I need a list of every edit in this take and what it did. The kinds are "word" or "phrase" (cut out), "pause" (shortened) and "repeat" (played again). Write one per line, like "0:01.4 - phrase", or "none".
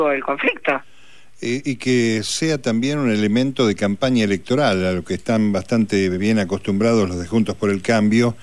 none